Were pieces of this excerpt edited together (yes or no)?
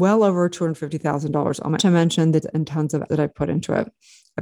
yes